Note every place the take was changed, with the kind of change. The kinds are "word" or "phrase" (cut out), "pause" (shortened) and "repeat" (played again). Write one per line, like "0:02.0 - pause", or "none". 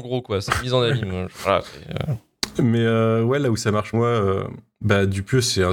0:03.9 - phrase